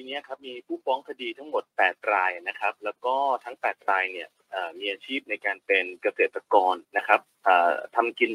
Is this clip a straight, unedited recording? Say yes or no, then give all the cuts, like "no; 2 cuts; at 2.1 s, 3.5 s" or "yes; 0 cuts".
no; 1 cut; at 6.8 s